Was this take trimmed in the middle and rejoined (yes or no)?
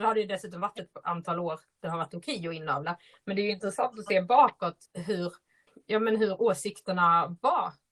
no